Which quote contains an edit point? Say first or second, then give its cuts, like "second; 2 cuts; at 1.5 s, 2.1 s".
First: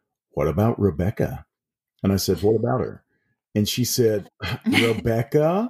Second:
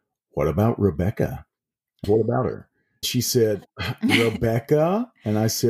second; 2 cuts; at 2.0 s, 3.0 s